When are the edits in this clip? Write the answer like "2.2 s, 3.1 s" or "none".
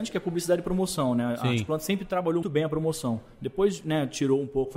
2.4 s